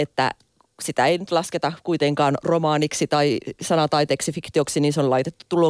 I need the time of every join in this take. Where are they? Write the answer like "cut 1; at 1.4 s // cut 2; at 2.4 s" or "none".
none